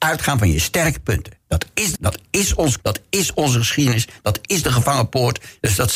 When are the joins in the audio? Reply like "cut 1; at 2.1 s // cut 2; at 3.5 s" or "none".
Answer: cut 1; at 2.0 s // cut 2; at 2.8 s // cut 3; at 4.5 s